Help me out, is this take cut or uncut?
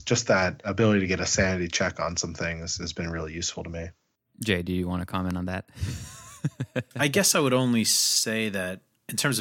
uncut